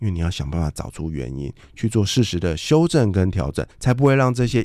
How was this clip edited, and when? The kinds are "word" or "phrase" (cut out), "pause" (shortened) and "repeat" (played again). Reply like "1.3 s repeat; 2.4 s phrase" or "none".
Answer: 3.7 s pause